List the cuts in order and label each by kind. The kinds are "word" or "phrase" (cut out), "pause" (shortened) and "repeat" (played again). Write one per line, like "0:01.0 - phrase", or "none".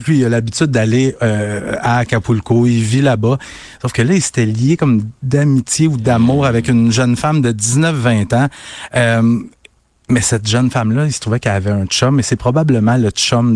none